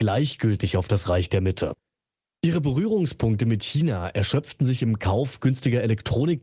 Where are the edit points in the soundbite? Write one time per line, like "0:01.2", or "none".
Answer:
none